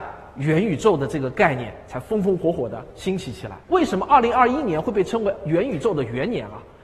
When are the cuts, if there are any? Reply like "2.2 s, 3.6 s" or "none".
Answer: 3.6 s